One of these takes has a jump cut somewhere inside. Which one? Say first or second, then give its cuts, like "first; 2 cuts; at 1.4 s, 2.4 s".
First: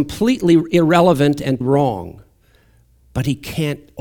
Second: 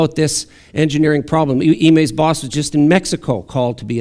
first; 1 cut; at 1.6 s